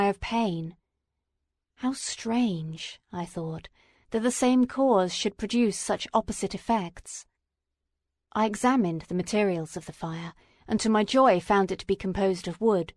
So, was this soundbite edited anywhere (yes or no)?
no